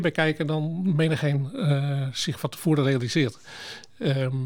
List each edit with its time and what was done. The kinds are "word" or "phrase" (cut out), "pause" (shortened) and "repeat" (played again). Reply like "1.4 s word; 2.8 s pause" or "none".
none